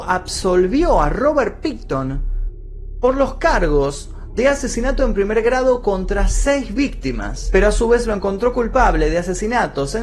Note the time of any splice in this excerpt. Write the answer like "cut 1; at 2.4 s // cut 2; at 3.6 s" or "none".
none